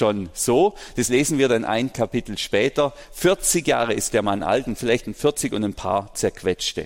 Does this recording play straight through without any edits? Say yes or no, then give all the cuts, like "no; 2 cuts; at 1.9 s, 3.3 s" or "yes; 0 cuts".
yes; 0 cuts